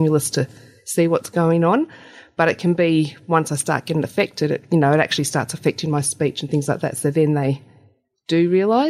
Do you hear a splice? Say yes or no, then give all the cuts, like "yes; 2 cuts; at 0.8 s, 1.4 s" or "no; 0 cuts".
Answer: no; 0 cuts